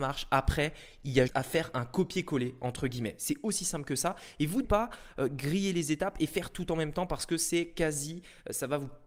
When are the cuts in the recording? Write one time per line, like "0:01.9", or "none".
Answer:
0:01.3
0:04.6